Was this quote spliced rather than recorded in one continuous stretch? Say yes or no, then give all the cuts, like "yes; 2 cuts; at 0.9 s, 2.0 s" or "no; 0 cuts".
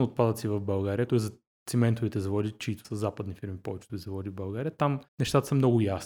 yes; 4 cuts; at 1.1 s, 2.8 s, 3.9 s, 5.1 s